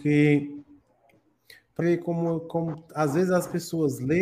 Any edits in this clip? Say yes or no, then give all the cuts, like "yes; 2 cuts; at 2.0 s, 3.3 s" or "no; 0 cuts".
yes; 1 cut; at 1.8 s